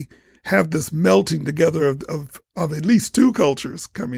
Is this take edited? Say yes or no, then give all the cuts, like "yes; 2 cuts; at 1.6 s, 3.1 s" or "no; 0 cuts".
no; 0 cuts